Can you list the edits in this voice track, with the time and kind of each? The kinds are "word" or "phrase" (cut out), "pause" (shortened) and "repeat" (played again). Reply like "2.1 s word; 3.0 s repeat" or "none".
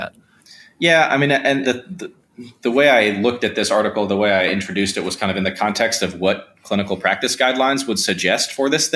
1.6 s word